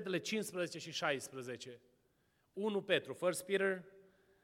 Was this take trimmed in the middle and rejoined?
no; 0 cuts

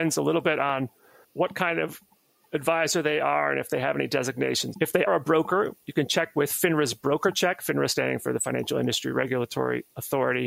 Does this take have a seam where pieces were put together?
yes; 3 cuts; at 1.2 s, 4.7 s, 5.1 s

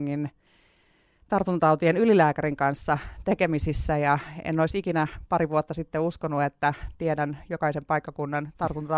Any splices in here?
no; 0 cuts

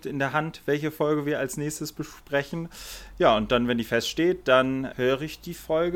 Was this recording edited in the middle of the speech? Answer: yes; 1 cut; at 4.9 s

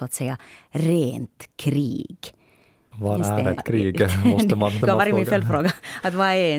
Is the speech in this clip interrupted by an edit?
yes; 2 cuts; at 3.6 s, 4.8 s

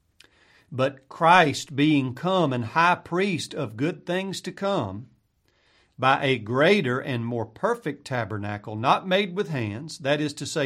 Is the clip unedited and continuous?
yes; 0 cuts

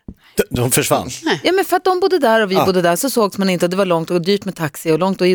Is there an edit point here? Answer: no; 0 cuts

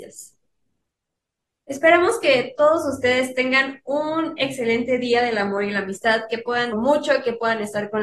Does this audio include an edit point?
yes; 1 cut; at 6.7 s

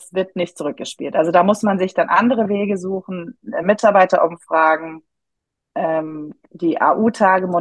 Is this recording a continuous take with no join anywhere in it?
yes; 0 cuts

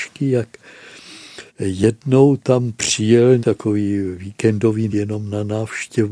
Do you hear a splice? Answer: yes; 3 cuts; at 1.5 s, 3.4 s, 4.9 s

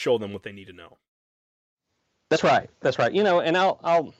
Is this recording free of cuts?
yes; 0 cuts

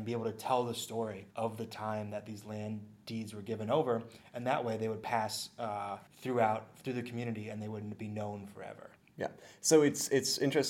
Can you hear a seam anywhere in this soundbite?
yes; 3 cuts; at 1.3 s, 6.1 s, 9.0 s

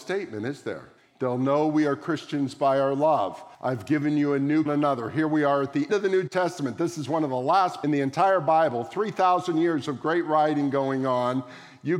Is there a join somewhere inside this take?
yes; 5 cuts; at 1.0 s, 3.5 s, 4.7 s, 5.9 s, 7.8 s

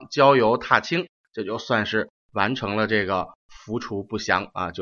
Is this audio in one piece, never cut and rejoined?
yes; 0 cuts

